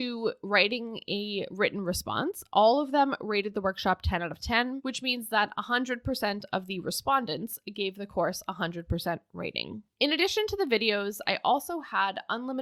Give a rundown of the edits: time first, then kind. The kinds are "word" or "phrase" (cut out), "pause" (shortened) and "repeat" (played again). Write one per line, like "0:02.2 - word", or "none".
none